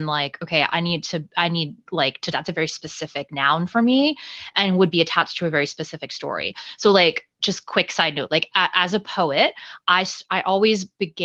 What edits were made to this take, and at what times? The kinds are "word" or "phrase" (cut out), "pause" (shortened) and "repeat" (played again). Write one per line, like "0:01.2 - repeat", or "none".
0:02.3 - phrase